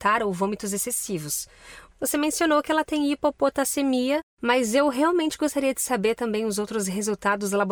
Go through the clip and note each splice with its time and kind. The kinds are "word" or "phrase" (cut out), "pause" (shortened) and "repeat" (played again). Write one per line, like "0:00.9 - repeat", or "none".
none